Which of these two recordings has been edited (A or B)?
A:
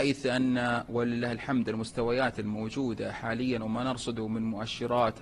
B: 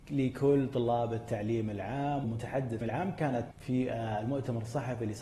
B